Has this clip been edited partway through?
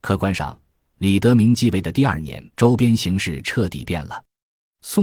yes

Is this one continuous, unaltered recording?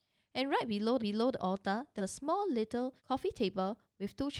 no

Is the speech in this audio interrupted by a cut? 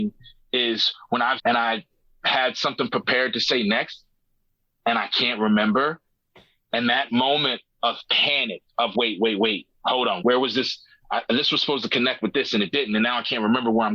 yes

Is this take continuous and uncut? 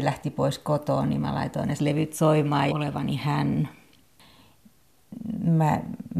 no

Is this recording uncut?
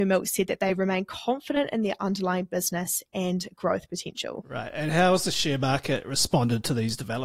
yes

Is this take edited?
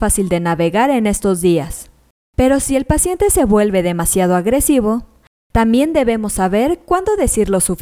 no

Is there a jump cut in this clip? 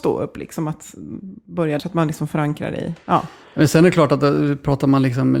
yes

